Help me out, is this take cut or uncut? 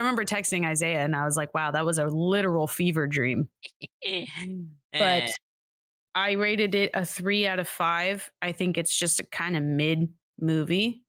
uncut